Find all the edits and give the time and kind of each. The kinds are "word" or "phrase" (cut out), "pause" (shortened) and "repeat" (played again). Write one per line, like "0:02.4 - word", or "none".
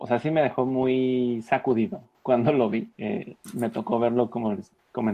0:02.9 - pause